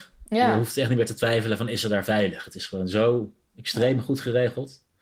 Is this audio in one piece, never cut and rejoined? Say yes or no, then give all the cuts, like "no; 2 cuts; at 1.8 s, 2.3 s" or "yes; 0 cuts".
yes; 0 cuts